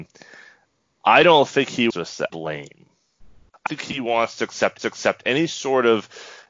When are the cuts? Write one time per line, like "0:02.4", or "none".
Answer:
0:01.9
0:02.3
0:03.7
0:04.8